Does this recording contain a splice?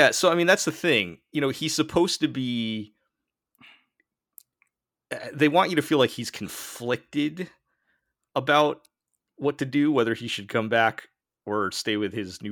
no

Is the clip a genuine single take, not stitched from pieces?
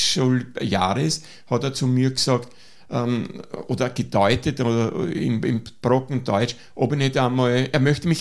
yes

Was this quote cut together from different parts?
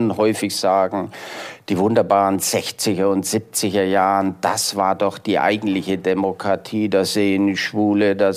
no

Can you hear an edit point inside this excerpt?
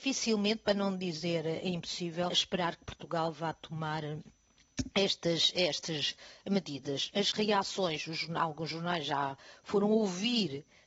yes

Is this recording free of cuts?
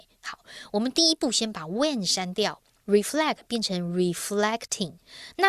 yes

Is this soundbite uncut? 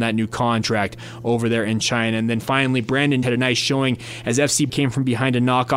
no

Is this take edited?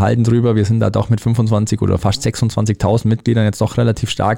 no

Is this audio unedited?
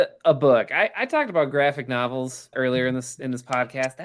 no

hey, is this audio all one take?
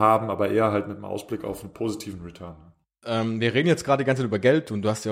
yes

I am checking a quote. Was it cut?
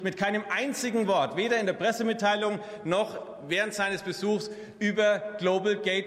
no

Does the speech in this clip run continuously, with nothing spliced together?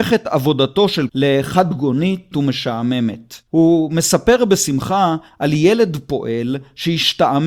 no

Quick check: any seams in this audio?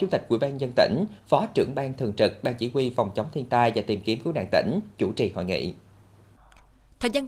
no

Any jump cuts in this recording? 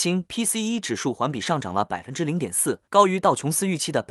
yes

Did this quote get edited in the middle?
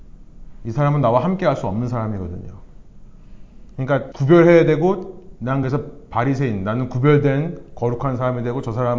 no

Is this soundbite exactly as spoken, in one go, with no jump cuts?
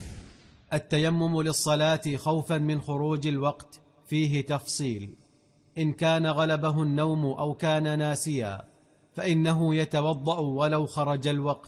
yes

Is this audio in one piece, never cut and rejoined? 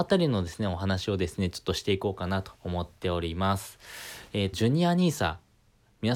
no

